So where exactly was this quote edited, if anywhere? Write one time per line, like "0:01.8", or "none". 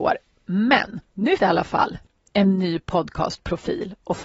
0:01.4